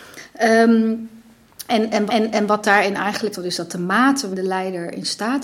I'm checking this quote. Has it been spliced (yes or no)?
yes